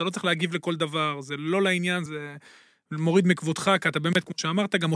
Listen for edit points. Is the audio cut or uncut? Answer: cut